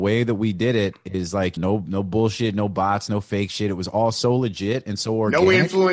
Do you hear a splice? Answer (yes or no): yes